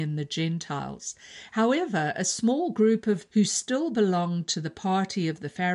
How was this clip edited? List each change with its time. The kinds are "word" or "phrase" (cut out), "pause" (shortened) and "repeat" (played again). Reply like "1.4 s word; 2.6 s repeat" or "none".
3.3 s word

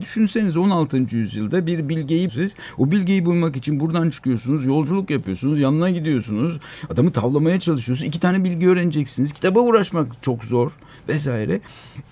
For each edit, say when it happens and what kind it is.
2.3 s word

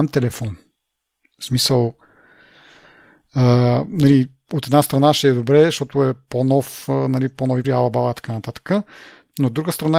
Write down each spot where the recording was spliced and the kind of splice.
7.6 s word

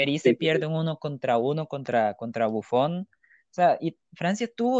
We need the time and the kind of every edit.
none

